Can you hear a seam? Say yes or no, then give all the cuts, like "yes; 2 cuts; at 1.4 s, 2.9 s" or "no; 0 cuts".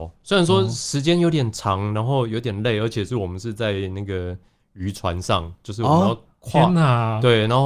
no; 0 cuts